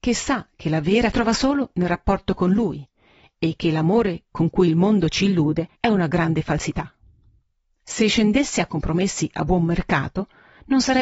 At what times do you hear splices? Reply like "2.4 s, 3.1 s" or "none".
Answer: 1.1 s, 5.8 s